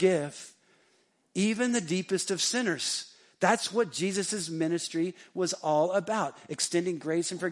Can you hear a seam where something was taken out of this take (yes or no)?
no